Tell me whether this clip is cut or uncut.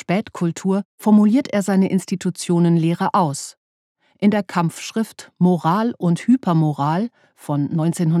uncut